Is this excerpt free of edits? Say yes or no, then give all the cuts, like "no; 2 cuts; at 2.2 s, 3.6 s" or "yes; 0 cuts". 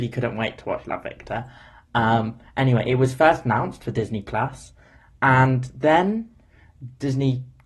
yes; 0 cuts